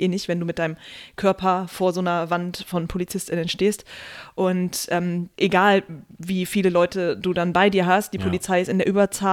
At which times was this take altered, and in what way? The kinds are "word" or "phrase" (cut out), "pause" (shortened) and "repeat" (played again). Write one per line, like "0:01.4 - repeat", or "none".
0:05.3 - pause